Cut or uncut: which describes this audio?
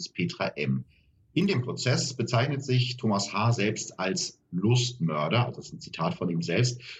uncut